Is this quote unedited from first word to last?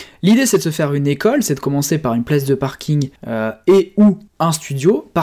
no; 2 cuts; at 3.2 s, 4.3 s

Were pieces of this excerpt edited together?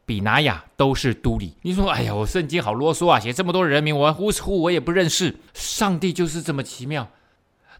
yes; 2 cuts; at 1.6 s, 5.5 s

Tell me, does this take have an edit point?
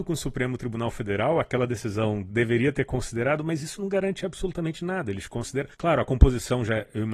yes; 1 cut; at 5.7 s

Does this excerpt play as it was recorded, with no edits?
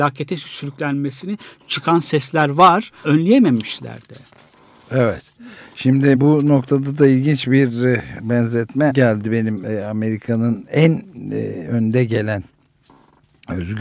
no; 3 cuts; at 3.0 s, 6.1 s, 8.9 s

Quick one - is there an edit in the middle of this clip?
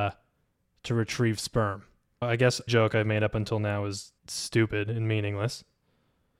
yes; 3 cuts; at 2.2 s, 2.7 s, 4.2 s

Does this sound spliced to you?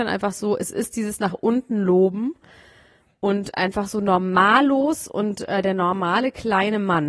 no; 0 cuts

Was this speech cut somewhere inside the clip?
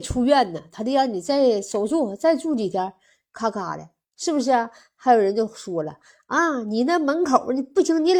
no; 0 cuts

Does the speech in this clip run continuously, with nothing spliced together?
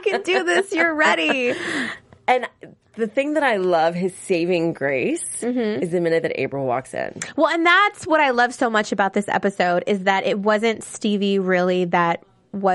yes; 0 cuts

